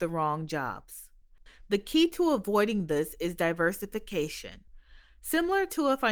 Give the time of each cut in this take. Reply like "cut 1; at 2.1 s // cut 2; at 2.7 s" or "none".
none